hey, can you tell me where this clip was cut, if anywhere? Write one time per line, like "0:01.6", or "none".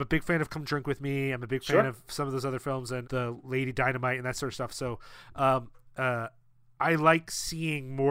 0:03.0